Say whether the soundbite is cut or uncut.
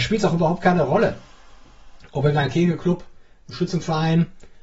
uncut